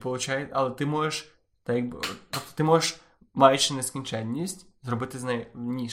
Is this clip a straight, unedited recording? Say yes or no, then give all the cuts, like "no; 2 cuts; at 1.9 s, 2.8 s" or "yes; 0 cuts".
yes; 0 cuts